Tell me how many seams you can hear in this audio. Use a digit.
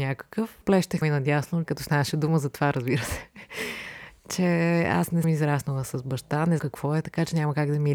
4